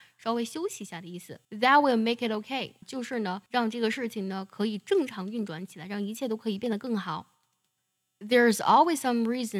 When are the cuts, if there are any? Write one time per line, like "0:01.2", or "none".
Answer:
0:01.4
0:02.8
0:03.5